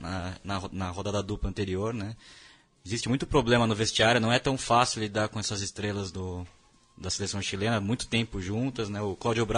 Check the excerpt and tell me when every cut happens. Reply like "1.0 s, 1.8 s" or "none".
none